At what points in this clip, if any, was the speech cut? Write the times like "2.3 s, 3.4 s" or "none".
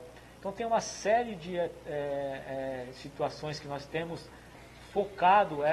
none